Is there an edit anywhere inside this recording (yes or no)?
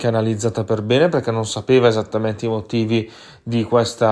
no